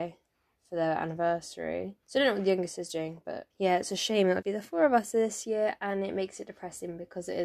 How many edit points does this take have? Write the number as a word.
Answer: three